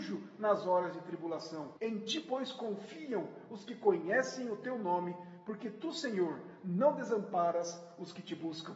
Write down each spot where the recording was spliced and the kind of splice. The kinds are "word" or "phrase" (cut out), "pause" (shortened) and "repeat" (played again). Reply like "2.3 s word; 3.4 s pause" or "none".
1.8 s pause